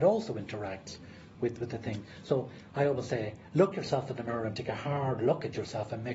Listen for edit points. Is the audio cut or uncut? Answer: uncut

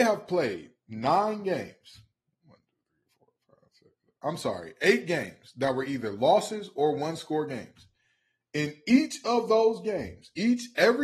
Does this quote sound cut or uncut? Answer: uncut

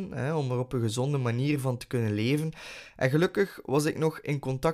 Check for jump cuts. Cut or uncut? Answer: uncut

